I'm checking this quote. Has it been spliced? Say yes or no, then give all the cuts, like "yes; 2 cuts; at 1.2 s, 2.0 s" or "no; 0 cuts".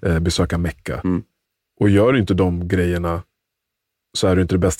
no; 0 cuts